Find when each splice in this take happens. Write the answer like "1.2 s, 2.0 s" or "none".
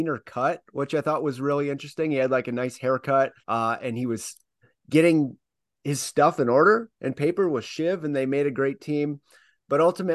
3.4 s